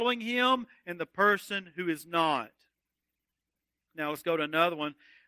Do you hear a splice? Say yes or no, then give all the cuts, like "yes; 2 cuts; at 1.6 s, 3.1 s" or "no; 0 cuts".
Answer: no; 0 cuts